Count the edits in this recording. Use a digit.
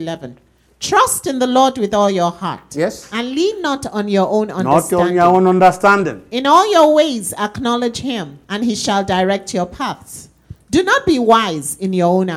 1